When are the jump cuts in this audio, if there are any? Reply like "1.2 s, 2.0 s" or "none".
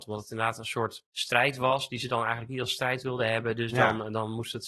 1.1 s